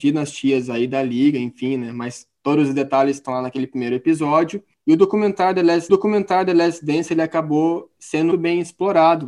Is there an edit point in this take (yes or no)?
yes